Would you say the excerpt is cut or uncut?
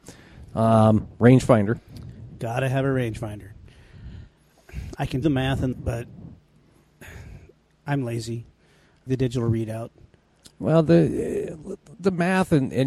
cut